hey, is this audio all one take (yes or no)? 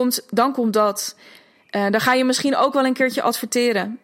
yes